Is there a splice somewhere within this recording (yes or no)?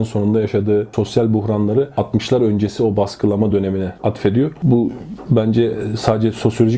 no